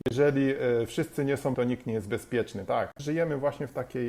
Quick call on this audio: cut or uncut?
cut